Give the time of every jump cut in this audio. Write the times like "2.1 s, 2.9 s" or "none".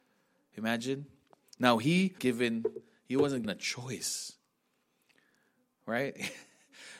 2.2 s, 3.4 s